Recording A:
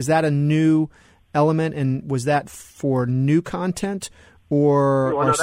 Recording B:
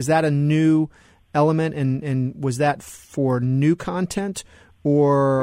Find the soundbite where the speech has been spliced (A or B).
A